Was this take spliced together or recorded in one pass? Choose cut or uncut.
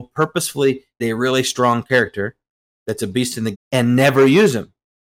cut